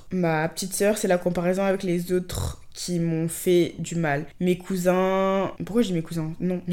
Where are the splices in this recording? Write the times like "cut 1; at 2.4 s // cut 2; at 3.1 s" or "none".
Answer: none